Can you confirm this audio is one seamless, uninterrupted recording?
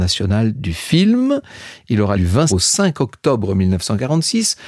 no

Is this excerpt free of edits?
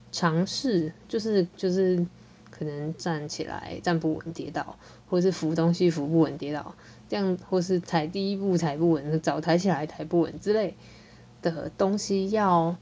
no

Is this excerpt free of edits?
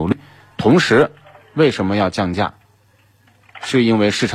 yes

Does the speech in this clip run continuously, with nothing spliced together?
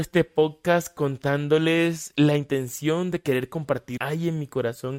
no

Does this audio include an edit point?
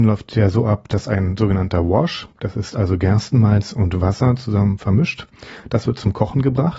yes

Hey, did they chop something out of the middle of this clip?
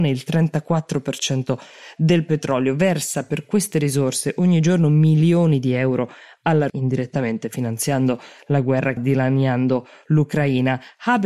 yes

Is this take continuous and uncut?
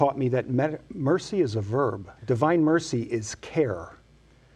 no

